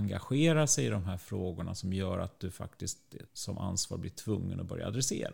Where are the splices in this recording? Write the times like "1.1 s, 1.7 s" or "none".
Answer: 3.3 s